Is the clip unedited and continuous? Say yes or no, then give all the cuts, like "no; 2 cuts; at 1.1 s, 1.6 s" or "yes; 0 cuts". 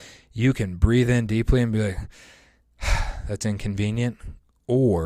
yes; 0 cuts